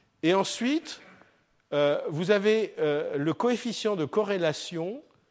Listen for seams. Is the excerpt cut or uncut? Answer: uncut